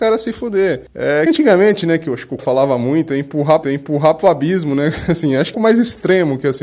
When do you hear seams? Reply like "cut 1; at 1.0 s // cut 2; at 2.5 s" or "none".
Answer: cut 1; at 1.3 s // cut 2; at 2.4 s // cut 3; at 3.6 s // cut 4; at 5.5 s